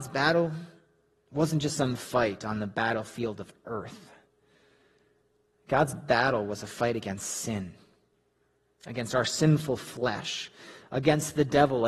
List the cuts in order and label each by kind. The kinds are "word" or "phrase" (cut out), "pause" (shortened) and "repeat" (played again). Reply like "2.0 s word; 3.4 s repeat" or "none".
2.0 s word